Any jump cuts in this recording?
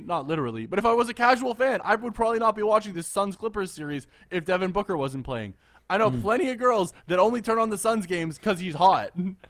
no; 0 cuts

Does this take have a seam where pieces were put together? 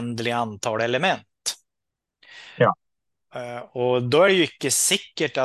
no; 0 cuts

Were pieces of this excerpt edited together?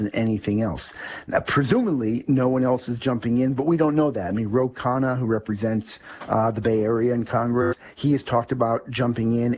no; 0 cuts

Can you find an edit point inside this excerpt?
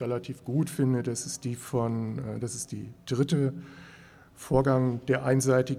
no; 0 cuts

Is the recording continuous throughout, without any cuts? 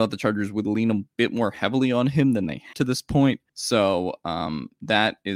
no; 2 cuts; at 2.7 s, 3.5 s

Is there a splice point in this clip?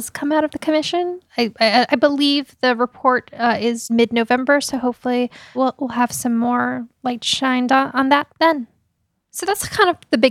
yes; 3 cuts; at 3.9 s, 5.5 s, 8.3 s

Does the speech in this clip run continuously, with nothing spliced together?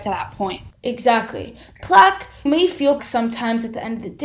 no; 2 cuts; at 2.5 s, 3.0 s

